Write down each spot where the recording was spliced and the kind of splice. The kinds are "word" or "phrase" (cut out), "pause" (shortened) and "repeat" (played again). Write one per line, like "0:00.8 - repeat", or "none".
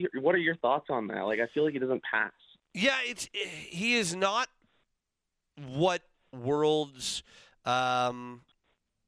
0:06.3 - phrase